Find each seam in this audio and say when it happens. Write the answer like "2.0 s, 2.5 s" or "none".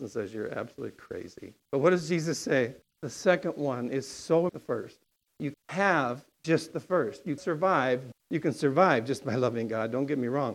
1.6 s, 2.8 s, 4.5 s, 5.5 s, 7.4 s, 8.1 s